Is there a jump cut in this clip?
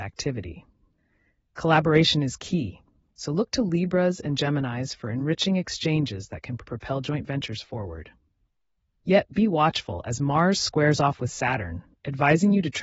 no; 0 cuts

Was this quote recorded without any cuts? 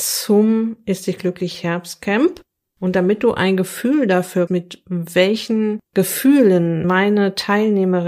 no; 2 cuts; at 4.5 s, 6.8 s

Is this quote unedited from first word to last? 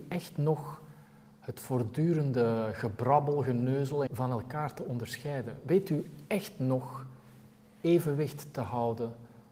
no; 1 cut; at 4.1 s

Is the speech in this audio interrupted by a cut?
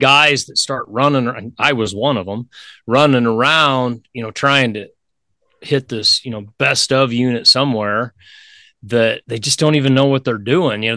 yes; 1 cut; at 9.2 s

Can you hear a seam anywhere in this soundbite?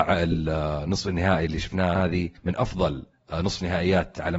yes; 2 cuts; at 2.0 s, 2.4 s

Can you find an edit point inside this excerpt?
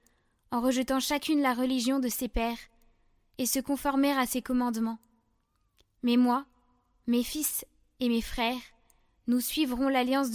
no; 0 cuts

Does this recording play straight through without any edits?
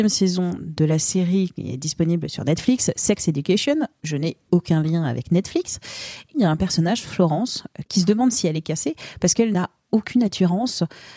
yes; 0 cuts

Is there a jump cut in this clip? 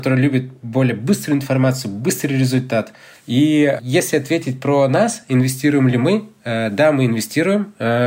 no; 0 cuts

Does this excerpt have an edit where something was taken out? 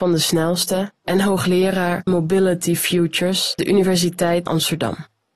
yes; 3 cuts; at 2.1 s, 3.6 s, 4.5 s

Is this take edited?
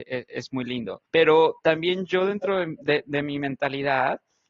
yes; 1 cut; at 1.1 s

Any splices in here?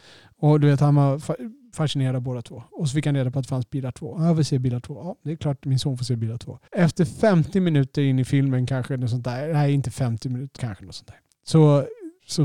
yes; 2 cuts; at 6.7 s, 10.6 s

